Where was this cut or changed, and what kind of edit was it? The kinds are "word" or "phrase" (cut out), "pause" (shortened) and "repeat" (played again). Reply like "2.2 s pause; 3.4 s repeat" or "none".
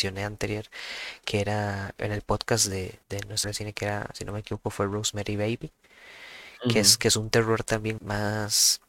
2.0 s word; 3.0 s pause; 3.4 s word; 8.0 s word